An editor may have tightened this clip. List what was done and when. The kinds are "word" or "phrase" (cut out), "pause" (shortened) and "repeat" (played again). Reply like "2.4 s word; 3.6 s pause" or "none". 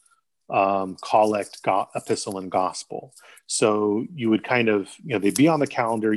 none